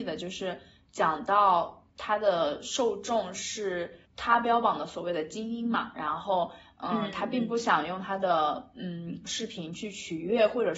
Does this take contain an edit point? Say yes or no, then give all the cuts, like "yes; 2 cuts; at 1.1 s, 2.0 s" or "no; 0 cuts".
yes; 2 cuts; at 1.9 s, 4.1 s